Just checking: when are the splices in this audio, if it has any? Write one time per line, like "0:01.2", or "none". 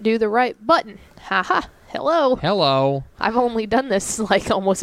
0:01.1